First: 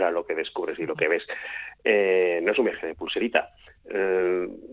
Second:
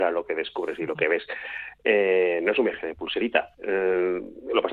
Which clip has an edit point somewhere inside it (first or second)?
second